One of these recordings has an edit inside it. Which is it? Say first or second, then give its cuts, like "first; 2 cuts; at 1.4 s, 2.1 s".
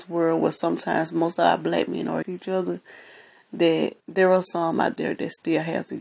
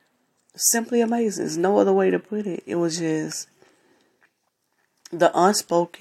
first; 2 cuts; at 2.2 s, 4.0 s